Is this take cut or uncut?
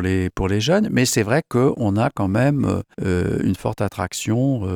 cut